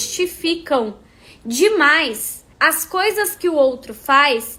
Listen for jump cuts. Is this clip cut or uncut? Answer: cut